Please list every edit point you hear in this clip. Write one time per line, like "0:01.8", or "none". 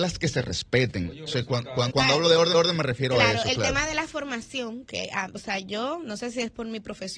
0:01.9
0:02.5